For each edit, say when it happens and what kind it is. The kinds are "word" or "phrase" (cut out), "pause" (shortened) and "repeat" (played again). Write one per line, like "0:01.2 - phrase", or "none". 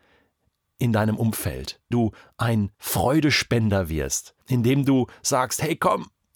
0:01.9 - word
0:02.7 - pause
0:04.4 - pause